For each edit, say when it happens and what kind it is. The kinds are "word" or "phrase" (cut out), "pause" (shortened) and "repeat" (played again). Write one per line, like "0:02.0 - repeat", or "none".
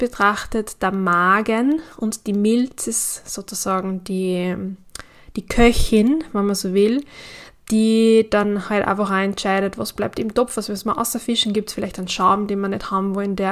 none